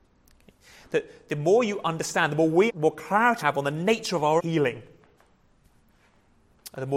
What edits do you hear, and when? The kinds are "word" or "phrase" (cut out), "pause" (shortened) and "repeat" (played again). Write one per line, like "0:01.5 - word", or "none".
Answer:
0:02.7 - word
0:03.4 - word
0:04.4 - word